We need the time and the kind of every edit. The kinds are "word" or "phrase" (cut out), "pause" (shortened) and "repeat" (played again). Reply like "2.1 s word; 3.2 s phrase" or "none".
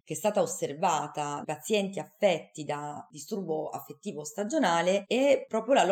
1.4 s word